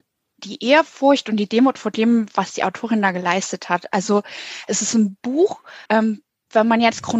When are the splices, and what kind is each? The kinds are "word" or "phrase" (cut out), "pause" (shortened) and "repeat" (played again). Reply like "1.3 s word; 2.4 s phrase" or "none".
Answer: 5.9 s pause